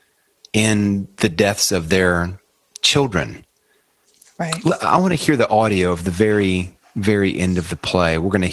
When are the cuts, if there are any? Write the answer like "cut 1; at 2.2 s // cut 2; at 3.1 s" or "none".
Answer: none